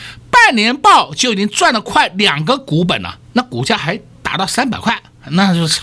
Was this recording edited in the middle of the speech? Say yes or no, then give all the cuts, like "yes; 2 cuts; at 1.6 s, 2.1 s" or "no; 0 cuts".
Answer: yes; 1 cut; at 3.2 s